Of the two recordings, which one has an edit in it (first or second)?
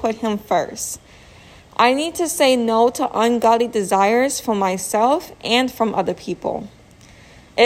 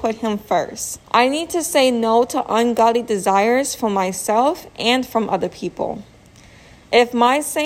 second